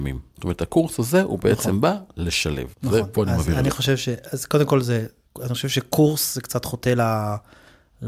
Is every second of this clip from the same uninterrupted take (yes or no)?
no